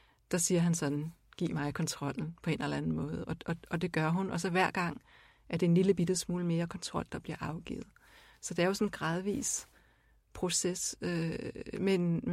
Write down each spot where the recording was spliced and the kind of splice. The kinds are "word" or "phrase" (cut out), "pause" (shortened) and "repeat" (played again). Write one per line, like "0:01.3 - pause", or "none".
none